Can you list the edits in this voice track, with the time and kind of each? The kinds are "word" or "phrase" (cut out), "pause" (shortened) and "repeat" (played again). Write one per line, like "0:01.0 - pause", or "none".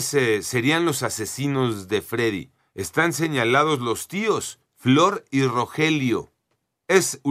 0:02.6 - pause
0:04.6 - pause